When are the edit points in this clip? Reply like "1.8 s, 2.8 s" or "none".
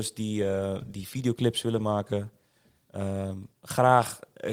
3.5 s